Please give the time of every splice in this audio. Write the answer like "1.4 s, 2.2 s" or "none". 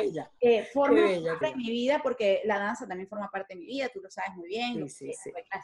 1.4 s